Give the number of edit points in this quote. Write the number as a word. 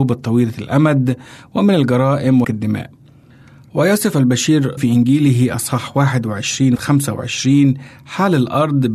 three